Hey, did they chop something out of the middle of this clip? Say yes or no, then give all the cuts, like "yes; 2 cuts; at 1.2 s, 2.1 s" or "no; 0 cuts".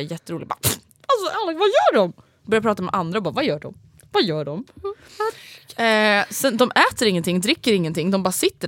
no; 0 cuts